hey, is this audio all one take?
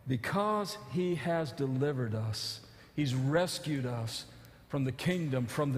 yes; 0 cuts

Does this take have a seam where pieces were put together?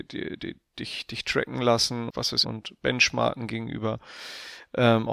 yes; 3 cuts; at 1.1 s, 2.1 s, 2.4 s

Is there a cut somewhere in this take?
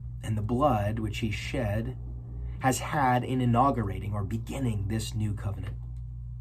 no; 0 cuts

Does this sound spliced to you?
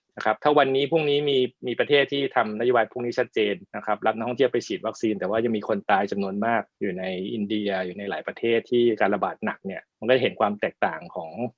yes; 4 cuts; at 1.5 s, 3.7 s, 6.7 s, 9.9 s

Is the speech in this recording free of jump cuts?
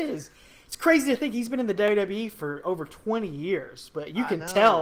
yes; 0 cuts

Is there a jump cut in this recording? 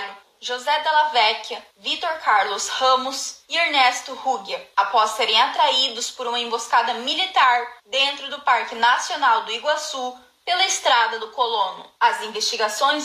no; 0 cuts

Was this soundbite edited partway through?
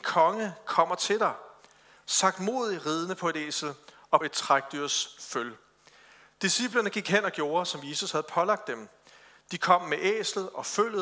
yes; 1 cut; at 4.2 s

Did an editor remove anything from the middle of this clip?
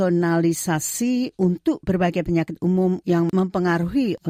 no; 0 cuts

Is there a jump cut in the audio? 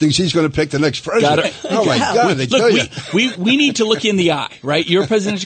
yes; 2 cuts; at 1.4 s, 3.3 s

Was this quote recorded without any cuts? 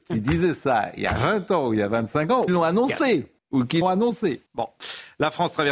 no; 4 cuts; at 2.5 s, 3.4 s, 3.8 s, 4.5 s

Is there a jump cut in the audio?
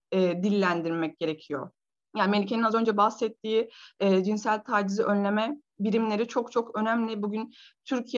no; 0 cuts

